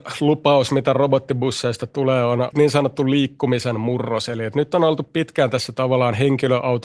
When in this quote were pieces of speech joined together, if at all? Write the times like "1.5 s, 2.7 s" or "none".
2.5 s